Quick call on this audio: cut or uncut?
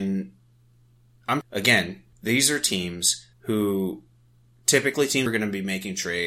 cut